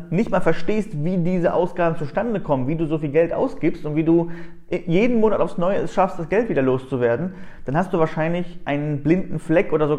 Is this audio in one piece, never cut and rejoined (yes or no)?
yes